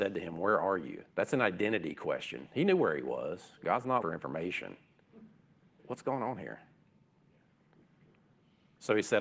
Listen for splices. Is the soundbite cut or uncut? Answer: cut